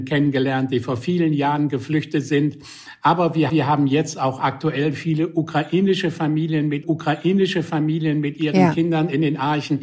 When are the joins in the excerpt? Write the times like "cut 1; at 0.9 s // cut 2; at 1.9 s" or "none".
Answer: cut 1; at 3.5 s // cut 2; at 6.8 s